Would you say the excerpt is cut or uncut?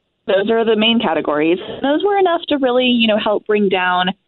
uncut